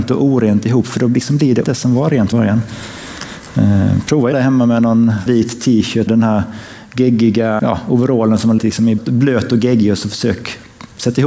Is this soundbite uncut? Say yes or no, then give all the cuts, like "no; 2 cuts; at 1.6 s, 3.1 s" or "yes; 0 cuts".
no; 8 cuts; at 1.6 s, 2.3 s, 4.3 s, 5.3 s, 6.1 s, 7.6 s, 8.6 s, 9.0 s